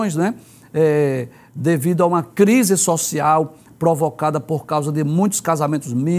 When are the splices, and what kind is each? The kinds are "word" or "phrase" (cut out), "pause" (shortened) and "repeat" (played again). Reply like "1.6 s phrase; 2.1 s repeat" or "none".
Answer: none